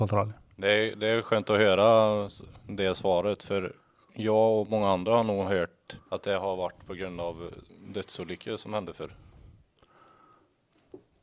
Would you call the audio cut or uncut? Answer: cut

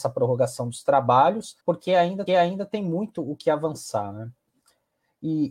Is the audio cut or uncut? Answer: cut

